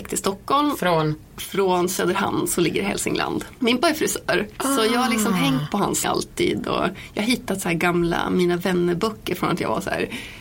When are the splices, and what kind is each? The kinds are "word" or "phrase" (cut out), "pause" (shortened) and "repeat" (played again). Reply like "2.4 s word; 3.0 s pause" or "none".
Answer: 3.8 s word; 6.0 s word